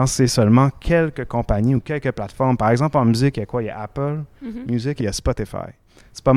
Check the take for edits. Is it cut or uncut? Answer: uncut